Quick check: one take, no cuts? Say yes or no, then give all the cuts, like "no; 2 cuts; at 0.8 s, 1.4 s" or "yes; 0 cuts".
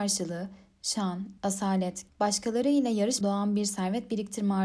no; 3 cuts; at 1.4 s, 2.1 s, 3.2 s